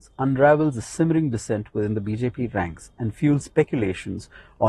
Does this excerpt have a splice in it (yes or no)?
no